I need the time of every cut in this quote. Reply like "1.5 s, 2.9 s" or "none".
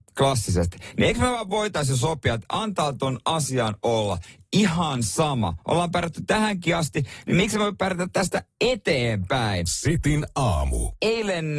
none

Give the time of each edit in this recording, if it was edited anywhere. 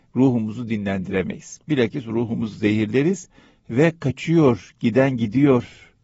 none

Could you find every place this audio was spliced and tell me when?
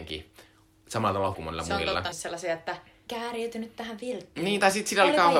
1.3 s, 2.1 s, 3.1 s

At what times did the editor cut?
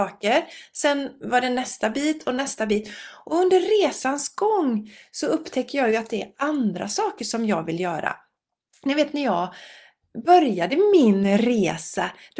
none

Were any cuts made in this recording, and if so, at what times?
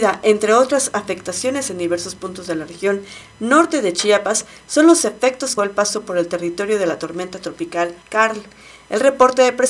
5.6 s, 8.0 s

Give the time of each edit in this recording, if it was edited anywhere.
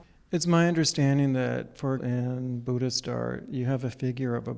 2.0 s

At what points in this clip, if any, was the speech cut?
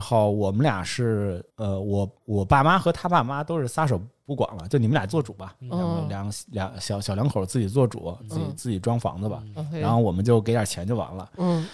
1.5 s, 2.2 s

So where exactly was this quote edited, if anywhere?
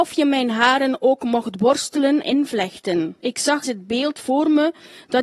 2.2 s, 3.2 s, 3.6 s

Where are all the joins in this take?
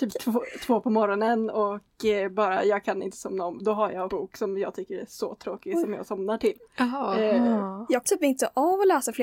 4.1 s, 8.0 s

